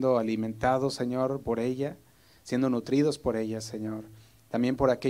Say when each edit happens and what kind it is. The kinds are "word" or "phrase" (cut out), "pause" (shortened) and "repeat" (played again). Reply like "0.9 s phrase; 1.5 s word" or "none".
none